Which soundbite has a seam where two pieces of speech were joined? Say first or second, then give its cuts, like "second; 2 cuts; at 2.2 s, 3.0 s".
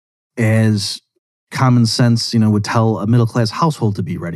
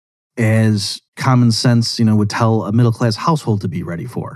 second; 1 cut; at 1.1 s